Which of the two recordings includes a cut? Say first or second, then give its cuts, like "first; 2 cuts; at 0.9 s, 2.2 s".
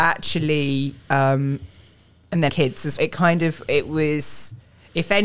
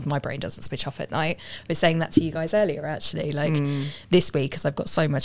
first; 2 cuts; at 2.5 s, 3.0 s